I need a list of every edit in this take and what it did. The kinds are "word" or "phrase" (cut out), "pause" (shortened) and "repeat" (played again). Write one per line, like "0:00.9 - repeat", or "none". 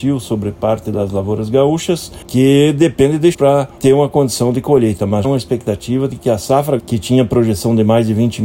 0:03.3 - word
0:05.2 - word
0:06.8 - word